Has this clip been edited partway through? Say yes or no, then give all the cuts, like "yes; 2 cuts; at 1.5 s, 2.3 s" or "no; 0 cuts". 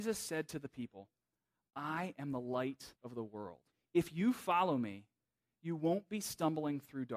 yes; 2 cuts; at 3.0 s, 3.7 s